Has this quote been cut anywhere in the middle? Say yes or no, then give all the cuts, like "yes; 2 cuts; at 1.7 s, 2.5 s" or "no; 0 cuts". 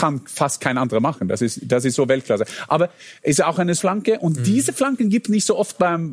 yes; 1 cut; at 3.8 s